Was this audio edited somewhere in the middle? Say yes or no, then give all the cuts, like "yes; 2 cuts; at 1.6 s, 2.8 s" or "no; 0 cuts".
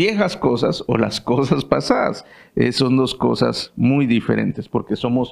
no; 0 cuts